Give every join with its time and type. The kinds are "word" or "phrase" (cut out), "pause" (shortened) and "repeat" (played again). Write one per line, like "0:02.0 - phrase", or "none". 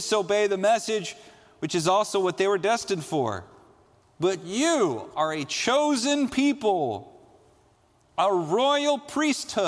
none